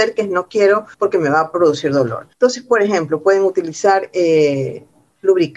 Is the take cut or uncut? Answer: cut